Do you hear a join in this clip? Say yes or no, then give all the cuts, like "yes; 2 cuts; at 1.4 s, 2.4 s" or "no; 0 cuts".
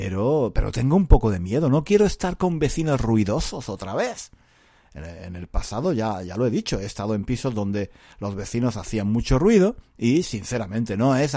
no; 0 cuts